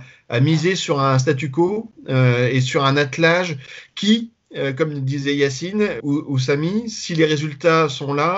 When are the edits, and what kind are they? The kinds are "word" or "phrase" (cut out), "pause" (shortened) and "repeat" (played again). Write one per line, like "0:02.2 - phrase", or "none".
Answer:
0:06.0 - word